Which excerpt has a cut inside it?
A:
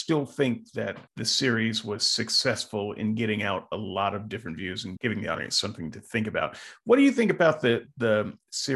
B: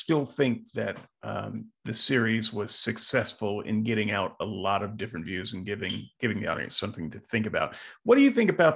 A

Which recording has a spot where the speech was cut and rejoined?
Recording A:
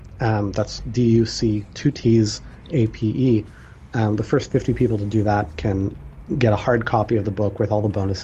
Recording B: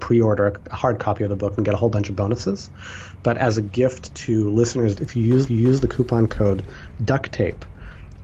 B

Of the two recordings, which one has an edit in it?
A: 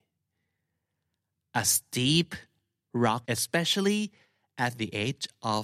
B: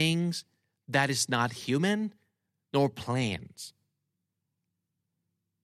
A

